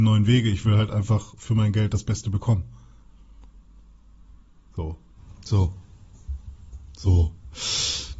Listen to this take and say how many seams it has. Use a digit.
0